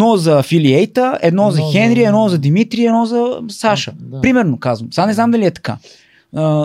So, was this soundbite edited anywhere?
no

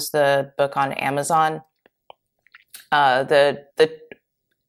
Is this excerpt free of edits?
no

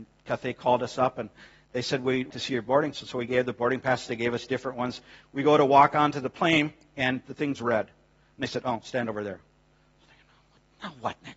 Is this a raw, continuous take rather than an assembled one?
no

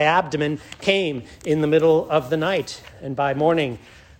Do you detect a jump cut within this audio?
no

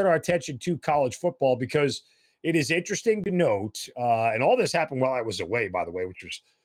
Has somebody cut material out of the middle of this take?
no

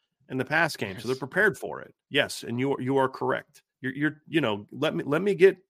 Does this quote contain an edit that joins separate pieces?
yes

